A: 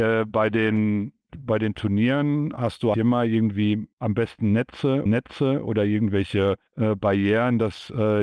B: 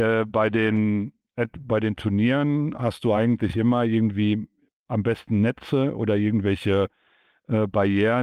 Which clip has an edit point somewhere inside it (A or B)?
A